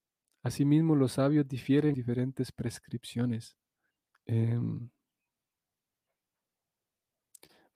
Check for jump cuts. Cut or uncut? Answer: cut